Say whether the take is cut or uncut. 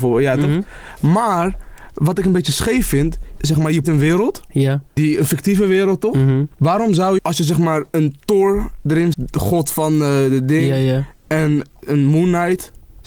cut